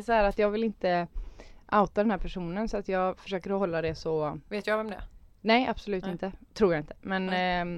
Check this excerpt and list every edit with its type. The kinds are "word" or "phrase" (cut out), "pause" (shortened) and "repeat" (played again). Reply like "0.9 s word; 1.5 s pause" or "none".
none